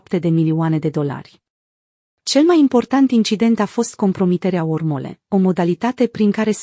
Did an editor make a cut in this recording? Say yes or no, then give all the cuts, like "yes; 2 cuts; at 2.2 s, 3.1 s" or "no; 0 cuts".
no; 0 cuts